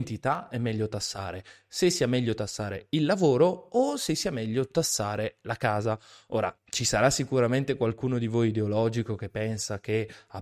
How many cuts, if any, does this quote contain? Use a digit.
1